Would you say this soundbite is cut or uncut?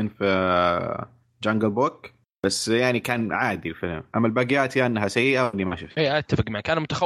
uncut